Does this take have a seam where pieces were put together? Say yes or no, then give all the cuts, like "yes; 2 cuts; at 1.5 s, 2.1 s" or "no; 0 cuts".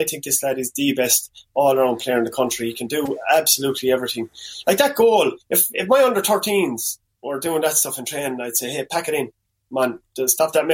yes; 1 cut; at 5.4 s